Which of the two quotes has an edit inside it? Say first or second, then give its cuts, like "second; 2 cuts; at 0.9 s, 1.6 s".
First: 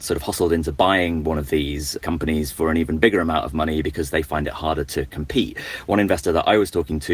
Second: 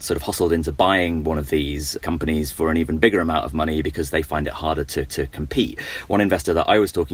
second; 1 cut; at 5.1 s